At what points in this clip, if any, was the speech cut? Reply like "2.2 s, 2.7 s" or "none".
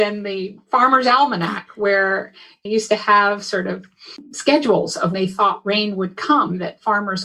2.7 s, 5.1 s